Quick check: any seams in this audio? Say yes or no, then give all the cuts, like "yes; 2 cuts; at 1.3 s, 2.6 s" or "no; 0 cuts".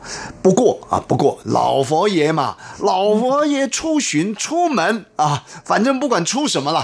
yes; 1 cut; at 4.4 s